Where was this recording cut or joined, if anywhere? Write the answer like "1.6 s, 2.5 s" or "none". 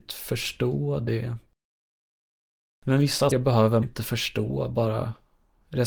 2.2 s, 3.3 s, 3.8 s

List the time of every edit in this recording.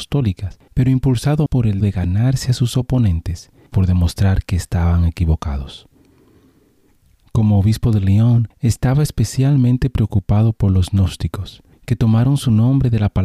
1.5 s, 1.8 s, 3.7 s, 8.5 s

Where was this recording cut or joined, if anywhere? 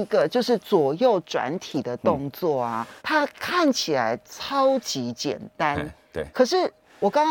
3.0 s

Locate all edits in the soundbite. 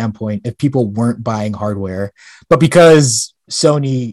none

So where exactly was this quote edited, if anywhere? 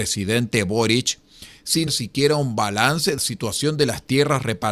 1.9 s, 3.2 s

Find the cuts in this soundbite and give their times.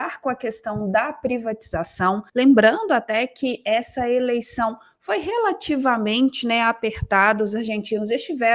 2.3 s

